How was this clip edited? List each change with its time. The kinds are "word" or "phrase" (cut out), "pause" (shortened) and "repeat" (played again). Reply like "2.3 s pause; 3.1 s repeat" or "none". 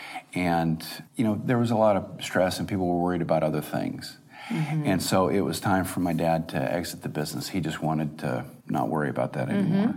1.1 s pause; 8.6 s pause